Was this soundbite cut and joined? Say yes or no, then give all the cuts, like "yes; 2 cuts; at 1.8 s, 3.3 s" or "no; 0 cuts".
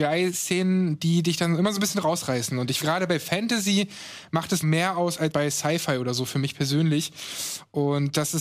yes; 3 cuts; at 2.8 s, 4.6 s, 5.3 s